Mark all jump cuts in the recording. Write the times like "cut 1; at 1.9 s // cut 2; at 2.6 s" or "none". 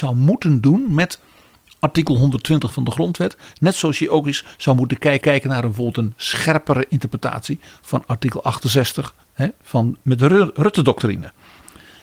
cut 1; at 5.2 s // cut 2; at 9.2 s